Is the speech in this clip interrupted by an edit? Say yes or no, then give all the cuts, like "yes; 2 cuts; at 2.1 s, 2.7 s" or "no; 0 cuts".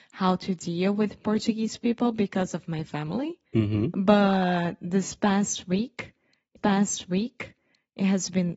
yes; 2 cuts; at 3.5 s, 6.6 s